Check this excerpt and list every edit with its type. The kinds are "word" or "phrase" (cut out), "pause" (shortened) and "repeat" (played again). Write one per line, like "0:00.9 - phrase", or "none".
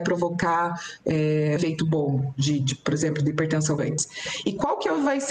0:01.6 - word
0:03.8 - phrase

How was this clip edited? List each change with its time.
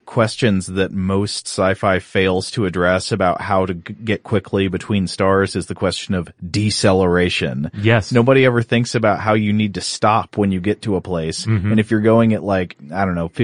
none

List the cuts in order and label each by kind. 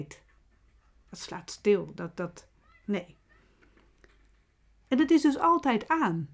none

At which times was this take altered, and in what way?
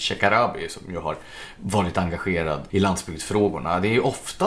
0:02.7 - word

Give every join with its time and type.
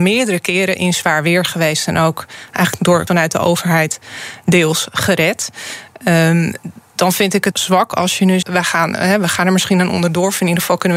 0:03.1 - word
0:07.5 - word
0:08.4 - word

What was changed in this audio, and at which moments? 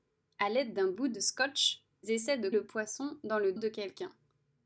0:02.0 - word
0:02.5 - word
0:03.6 - word

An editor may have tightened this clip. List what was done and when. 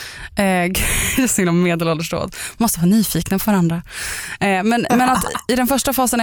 0:01.3 - word
0:04.9 - word

